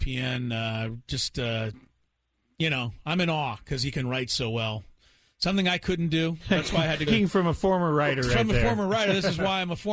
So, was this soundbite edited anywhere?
yes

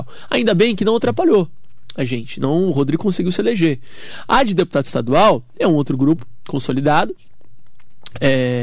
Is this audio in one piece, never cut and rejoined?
yes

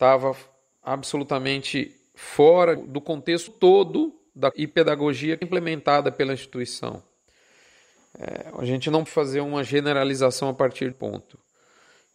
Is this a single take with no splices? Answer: no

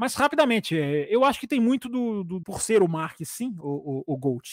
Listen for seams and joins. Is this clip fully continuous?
no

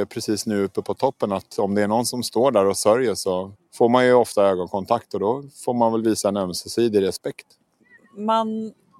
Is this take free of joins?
no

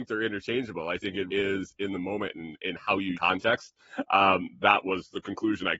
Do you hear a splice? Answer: yes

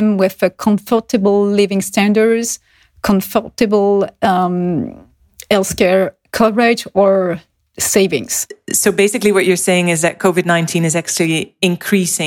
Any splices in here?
no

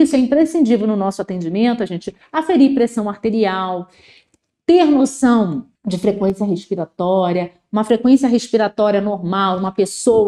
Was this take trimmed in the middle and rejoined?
yes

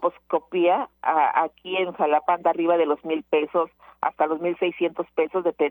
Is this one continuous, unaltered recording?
yes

